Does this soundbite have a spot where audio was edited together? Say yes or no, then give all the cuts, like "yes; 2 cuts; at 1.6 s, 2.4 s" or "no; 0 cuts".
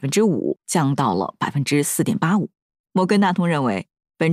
no; 0 cuts